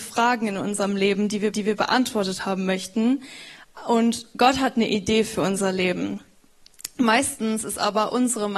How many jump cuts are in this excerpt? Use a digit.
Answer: 1